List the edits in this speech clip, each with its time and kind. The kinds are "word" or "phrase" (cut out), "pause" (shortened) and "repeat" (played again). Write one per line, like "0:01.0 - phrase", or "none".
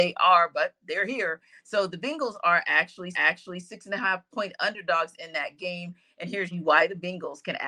0:03.1 - repeat
0:06.5 - phrase